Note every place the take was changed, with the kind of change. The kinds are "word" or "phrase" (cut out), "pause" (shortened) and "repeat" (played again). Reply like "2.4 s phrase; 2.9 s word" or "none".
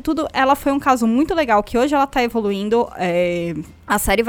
none